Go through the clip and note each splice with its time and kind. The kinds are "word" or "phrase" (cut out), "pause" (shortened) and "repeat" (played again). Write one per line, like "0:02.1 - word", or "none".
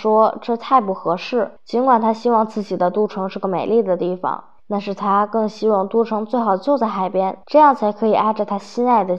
0:01.6 - pause
0:04.6 - pause
0:07.4 - pause